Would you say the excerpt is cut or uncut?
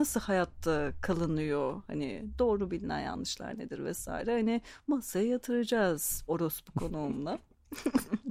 cut